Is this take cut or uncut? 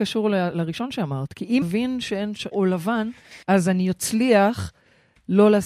cut